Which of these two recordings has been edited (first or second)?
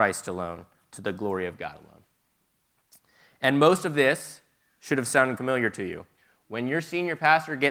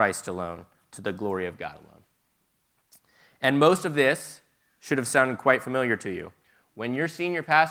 first